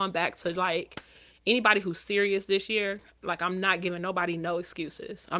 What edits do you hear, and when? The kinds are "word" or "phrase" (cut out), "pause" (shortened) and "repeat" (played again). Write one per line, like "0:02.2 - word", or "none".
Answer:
none